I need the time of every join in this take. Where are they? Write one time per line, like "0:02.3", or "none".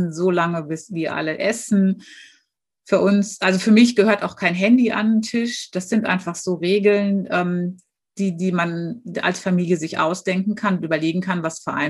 none